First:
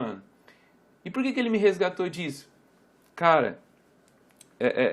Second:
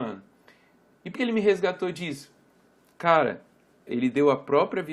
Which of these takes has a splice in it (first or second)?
second